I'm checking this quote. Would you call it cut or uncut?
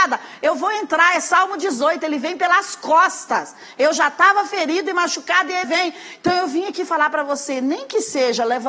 cut